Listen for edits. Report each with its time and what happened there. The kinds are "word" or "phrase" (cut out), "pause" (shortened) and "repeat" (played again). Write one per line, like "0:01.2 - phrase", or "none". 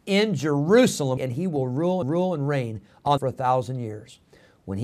0:01.2 - word
0:02.0 - repeat
0:03.2 - phrase